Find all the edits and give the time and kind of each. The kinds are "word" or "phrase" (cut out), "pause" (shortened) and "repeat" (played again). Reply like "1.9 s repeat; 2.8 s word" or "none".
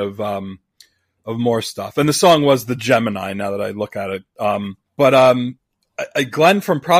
4.9 s pause